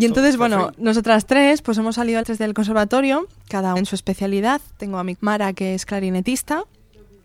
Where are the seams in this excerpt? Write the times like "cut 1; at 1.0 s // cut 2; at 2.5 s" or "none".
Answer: cut 1; at 2.2 s // cut 2; at 3.8 s // cut 3; at 5.1 s